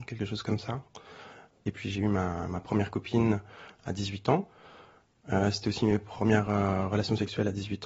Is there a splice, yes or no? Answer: no